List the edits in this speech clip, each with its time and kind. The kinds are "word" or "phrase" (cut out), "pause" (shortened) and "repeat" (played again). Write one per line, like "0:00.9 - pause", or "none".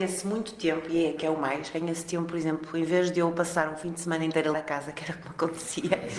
0:04.5 - word